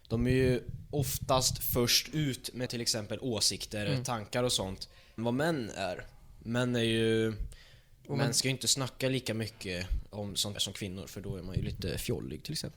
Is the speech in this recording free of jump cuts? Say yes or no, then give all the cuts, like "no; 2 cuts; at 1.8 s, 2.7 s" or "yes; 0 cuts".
no; 4 cuts; at 2.7 s, 3.8 s, 5.2 s, 10.6 s